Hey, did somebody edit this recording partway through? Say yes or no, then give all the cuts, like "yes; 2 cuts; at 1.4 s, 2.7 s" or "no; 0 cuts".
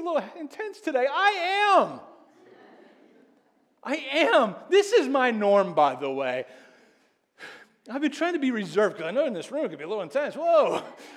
no; 0 cuts